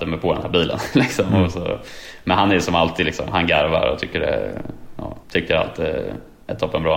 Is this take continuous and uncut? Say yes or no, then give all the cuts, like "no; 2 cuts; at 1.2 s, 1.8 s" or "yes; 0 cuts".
no; 1 cut; at 5.2 s